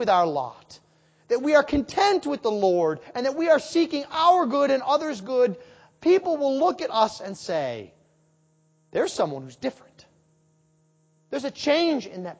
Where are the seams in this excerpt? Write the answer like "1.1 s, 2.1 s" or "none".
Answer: none